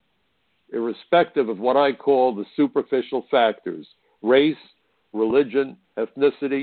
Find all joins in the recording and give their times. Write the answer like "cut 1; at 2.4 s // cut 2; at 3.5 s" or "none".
none